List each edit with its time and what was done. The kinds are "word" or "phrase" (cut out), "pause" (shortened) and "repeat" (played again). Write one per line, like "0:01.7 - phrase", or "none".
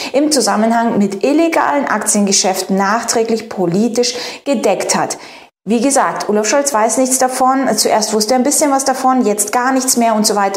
none